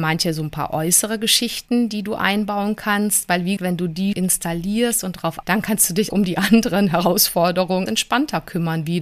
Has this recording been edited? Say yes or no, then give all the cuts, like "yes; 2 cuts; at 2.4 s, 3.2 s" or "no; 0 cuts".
yes; 5 cuts; at 3.6 s, 4.1 s, 5.4 s, 6.1 s, 7.9 s